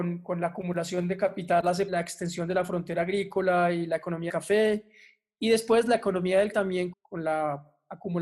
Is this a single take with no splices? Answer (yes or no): no